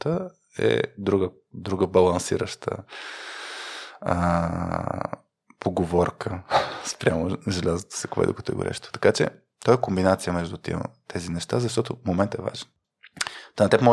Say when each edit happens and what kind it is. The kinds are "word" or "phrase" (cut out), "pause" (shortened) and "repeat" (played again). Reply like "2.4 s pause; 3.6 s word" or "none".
none